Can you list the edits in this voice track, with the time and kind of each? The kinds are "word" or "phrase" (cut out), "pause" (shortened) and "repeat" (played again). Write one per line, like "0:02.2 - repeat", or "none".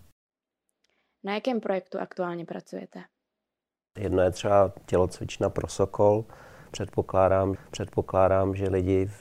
0:07.6 - repeat